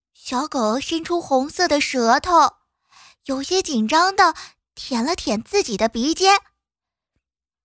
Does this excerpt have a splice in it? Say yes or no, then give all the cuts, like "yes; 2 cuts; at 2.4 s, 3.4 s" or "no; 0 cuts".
no; 0 cuts